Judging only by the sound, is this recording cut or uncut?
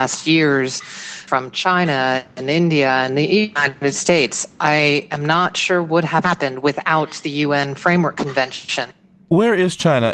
uncut